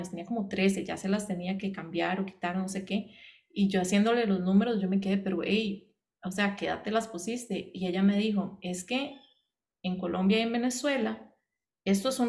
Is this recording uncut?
yes; 0 cuts

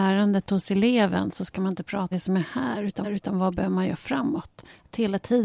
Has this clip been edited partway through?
yes; 2 cuts; at 2.1 s, 3.0 s

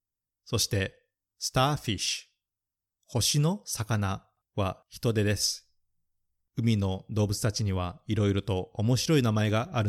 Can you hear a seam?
no; 0 cuts

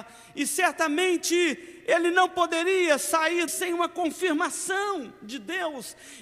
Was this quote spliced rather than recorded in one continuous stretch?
yes; 1 cut; at 3.5 s

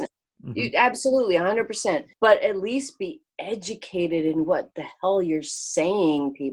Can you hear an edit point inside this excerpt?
yes; 1 cut; at 2.1 s

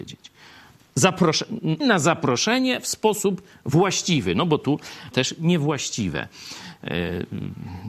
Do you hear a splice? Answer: yes; 2 cuts; at 1.8 s, 5.1 s

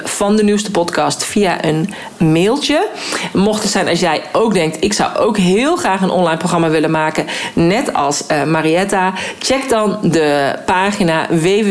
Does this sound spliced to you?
no; 0 cuts

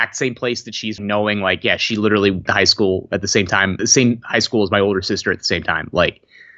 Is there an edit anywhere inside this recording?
yes; 3 cuts; at 1.0 s, 2.5 s, 3.8 s

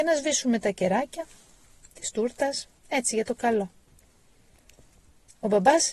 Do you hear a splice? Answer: yes; 1 cut; at 2.8 s

